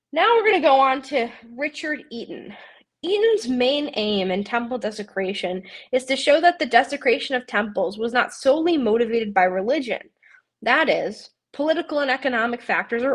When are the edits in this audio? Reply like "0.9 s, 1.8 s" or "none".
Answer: none